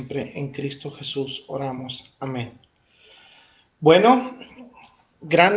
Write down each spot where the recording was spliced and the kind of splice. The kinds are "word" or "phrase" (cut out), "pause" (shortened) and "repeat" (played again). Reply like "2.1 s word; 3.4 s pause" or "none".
none